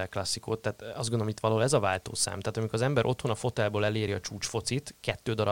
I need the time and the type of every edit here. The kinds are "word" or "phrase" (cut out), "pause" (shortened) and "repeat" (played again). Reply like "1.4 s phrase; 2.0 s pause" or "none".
none